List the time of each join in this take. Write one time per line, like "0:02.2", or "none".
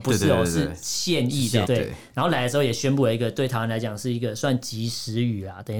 0:01.6